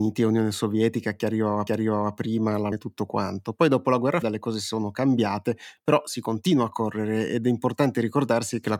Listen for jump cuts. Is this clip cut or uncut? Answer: cut